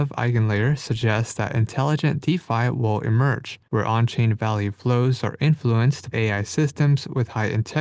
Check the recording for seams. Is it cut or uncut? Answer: cut